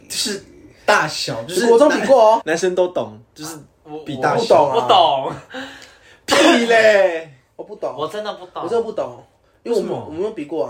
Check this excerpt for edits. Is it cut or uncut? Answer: cut